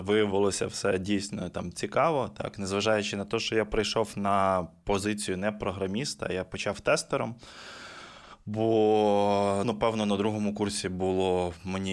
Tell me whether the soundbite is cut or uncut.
cut